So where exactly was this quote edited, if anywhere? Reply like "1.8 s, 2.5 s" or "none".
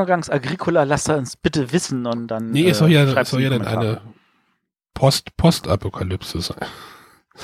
none